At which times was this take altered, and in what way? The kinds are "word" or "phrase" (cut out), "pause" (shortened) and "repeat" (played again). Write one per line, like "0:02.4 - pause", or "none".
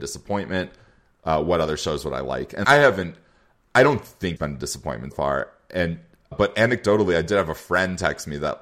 0:02.6 - word
0:04.4 - word
0:05.1 - word
0:06.3 - word

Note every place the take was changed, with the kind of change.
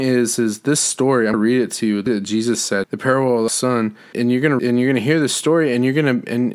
0:01.3 - word
0:02.1 - word
0:02.8 - word
0:03.5 - word
0:04.1 - word
0:04.6 - word

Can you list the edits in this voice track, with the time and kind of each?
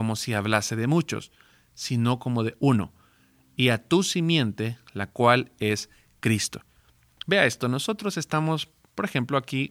none

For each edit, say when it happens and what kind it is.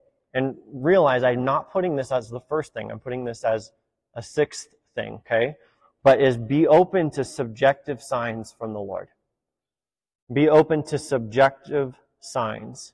none

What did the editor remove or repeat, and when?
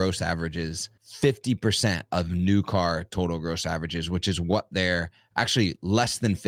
0:01.0 - pause

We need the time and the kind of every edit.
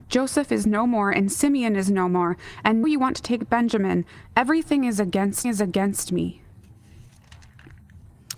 0:02.8 - word
0:05.4 - repeat

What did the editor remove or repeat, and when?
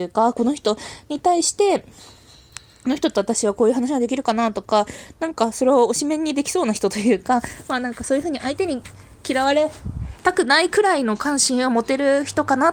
0:10.2 - pause

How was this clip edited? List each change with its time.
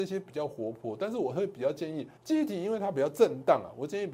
0:02.2 - pause

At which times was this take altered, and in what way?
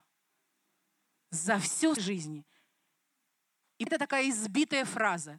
0:02.0 - word
0:03.9 - word

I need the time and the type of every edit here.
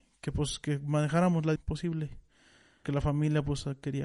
0:01.6 - word
0:02.8 - word

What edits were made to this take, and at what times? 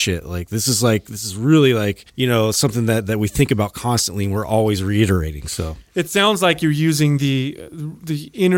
0:02.1 - pause

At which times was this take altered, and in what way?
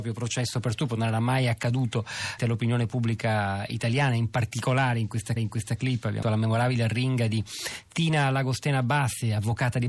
0:02.4 - phrase
0:05.4 - repeat
0:06.2 - word

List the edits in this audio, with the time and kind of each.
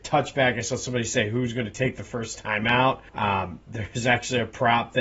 0:03.1 - pause

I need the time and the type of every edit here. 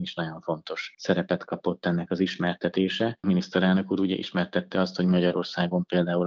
none

